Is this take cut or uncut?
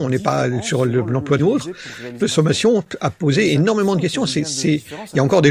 cut